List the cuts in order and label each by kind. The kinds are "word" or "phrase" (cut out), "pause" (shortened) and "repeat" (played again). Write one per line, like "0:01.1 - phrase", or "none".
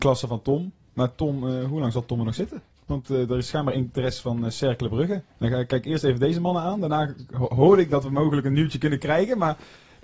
0:05.3 - pause